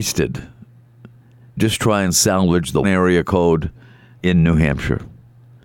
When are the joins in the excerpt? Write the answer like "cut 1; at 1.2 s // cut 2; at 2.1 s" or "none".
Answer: cut 1; at 1.6 s // cut 2; at 2.8 s // cut 3; at 4.2 s